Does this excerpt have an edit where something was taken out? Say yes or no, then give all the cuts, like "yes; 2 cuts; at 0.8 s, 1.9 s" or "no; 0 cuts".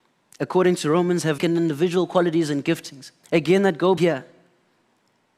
yes; 3 cuts; at 1.4 s, 3.2 s, 4.0 s